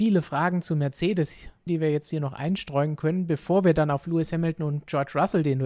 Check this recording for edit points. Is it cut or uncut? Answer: cut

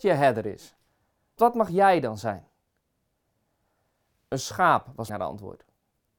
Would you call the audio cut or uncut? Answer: cut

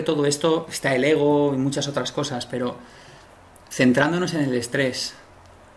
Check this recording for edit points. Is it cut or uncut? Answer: uncut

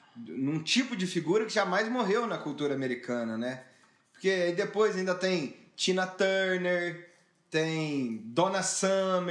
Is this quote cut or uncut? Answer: uncut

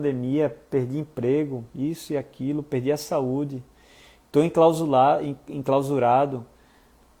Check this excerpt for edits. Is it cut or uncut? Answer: uncut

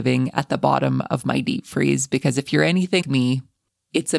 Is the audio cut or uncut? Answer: cut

